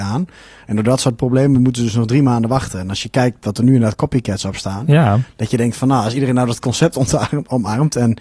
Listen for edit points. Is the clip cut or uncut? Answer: uncut